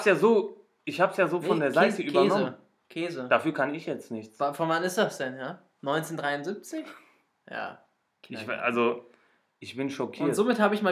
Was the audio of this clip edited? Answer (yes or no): no